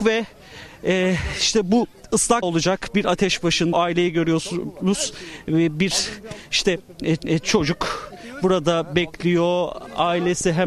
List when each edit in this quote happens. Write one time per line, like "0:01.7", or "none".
0:02.4
0:03.7
0:07.2